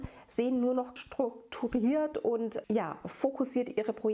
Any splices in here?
yes; 2 cuts; at 1.0 s, 2.6 s

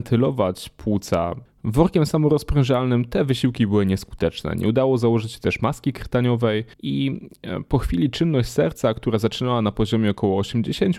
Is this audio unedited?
no; 1 cut; at 6.7 s

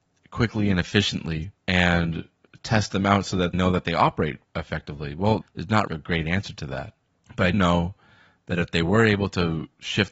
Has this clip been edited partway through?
yes; 7 cuts; at 1.6 s, 3.5 s, 4.4 s, 5.4 s, 5.9 s, 7.1 s, 7.5 s

